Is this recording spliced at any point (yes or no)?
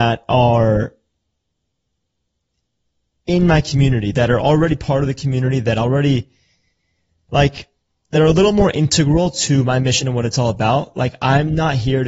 no